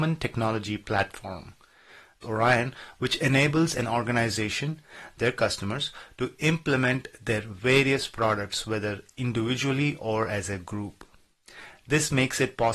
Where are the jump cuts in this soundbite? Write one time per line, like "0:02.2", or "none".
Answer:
0:02.2